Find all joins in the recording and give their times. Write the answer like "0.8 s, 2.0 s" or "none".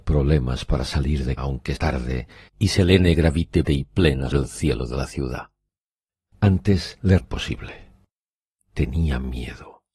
1.4 s, 1.8 s, 3.6 s, 4.3 s, 7.2 s